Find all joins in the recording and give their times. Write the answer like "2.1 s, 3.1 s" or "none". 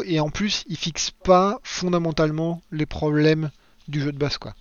none